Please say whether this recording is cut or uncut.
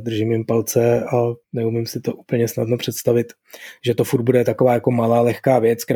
cut